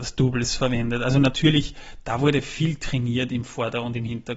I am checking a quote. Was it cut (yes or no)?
no